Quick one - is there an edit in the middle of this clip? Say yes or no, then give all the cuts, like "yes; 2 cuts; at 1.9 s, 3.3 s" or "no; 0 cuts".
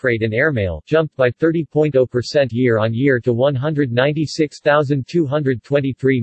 no; 0 cuts